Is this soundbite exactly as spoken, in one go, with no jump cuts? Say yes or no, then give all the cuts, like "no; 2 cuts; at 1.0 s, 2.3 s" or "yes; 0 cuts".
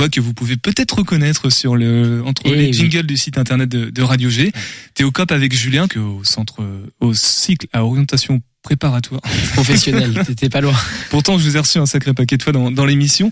no; 1 cut; at 5.9 s